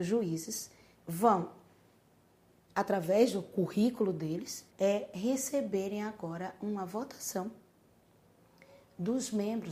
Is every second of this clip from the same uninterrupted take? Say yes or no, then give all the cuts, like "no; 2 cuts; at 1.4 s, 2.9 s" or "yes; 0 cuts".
no; 1 cut; at 4.7 s